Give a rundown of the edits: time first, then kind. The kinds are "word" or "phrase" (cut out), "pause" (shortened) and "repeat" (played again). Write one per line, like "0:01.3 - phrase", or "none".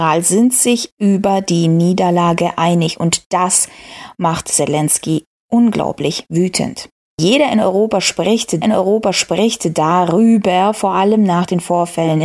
0:08.6 - repeat